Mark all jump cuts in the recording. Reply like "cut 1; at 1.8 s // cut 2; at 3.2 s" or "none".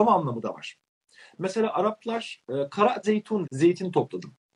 cut 1; at 3.0 s // cut 2; at 3.4 s